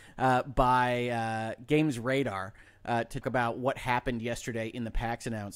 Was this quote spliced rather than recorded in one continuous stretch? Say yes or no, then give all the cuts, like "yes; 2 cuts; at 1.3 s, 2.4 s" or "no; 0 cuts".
yes; 1 cut; at 3.2 s